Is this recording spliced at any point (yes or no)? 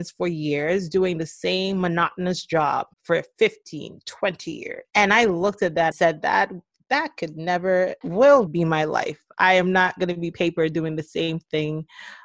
yes